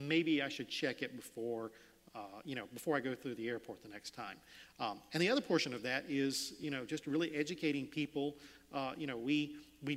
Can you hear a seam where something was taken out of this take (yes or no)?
no